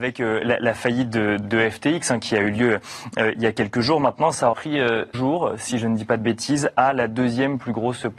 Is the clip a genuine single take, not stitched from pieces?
no; 3 cuts; at 1.4 s, 4.5 s, 5.1 s

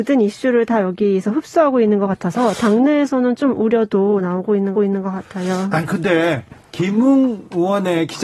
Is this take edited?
yes; 1 cut; at 4.7 s

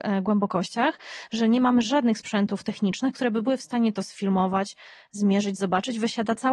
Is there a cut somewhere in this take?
no; 0 cuts

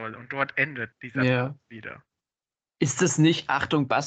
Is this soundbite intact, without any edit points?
no; 1 cut; at 0.9 s

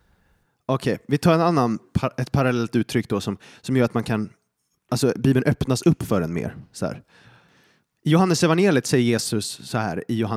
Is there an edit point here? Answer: no; 0 cuts

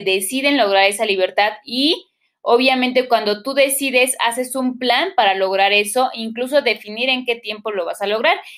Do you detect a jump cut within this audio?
no; 0 cuts

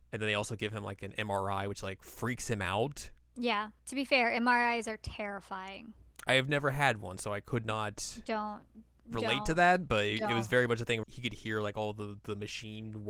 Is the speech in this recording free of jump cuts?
no; 2 cuts; at 3.8 s, 11.0 s

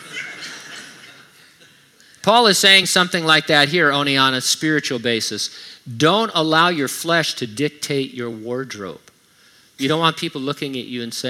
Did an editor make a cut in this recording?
no; 0 cuts

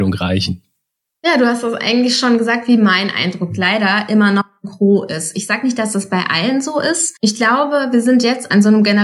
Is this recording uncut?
no; 1 cut; at 7.2 s

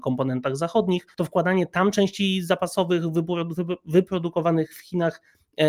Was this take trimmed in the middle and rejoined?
no; 0 cuts

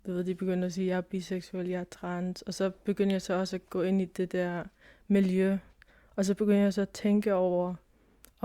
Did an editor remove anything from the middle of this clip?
no; 0 cuts

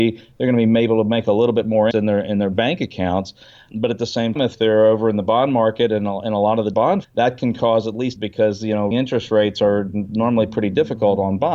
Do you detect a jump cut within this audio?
yes; 6 cuts; at 1.9 s, 4.4 s, 6.7 s, 7.0 s, 8.2 s, 8.9 s

